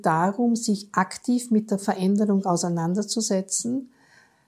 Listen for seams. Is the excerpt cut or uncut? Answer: uncut